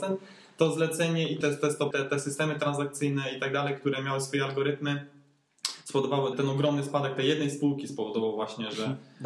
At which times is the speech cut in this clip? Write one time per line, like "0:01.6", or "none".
0:01.4
0:01.9
0:06.3